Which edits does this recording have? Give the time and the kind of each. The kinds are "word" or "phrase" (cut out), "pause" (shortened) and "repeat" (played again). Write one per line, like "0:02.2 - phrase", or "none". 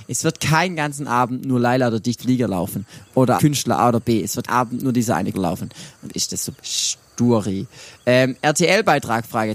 0:02.2 - word
0:03.4 - word
0:04.5 - word
0:05.3 - word
0:06.1 - word
0:06.6 - word